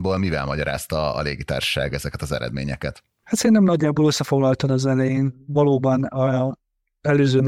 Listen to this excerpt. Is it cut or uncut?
uncut